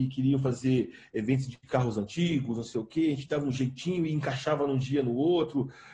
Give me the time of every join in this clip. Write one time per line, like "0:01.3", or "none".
none